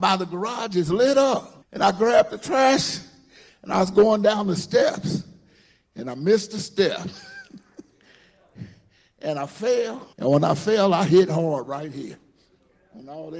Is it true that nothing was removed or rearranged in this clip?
no; 2 cuts; at 1.6 s, 10.1 s

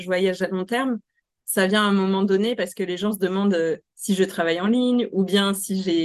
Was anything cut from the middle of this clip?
no; 0 cuts

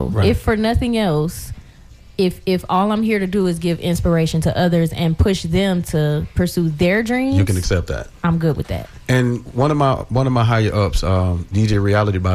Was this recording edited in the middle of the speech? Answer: no; 0 cuts

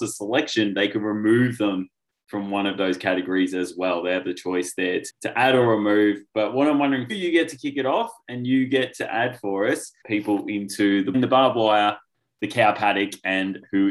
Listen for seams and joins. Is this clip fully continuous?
no; 4 cuts; at 5.1 s, 7.1 s, 10.0 s, 11.1 s

